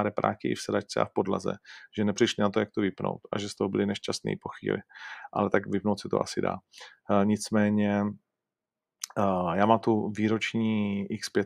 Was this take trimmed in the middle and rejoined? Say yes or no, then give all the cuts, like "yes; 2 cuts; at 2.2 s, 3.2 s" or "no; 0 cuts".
no; 0 cuts